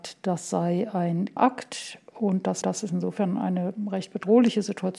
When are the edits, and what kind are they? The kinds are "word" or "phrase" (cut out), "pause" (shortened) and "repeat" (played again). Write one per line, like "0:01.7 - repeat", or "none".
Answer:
0:01.4 - word
0:02.6 - repeat